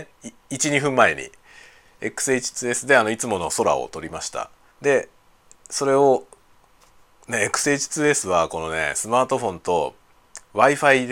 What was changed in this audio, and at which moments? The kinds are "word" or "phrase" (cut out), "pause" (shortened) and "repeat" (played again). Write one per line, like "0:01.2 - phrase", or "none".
0:04.7 - pause